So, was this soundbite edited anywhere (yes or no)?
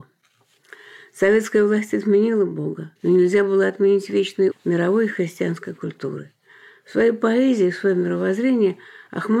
yes